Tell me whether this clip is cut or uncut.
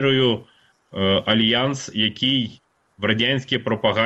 uncut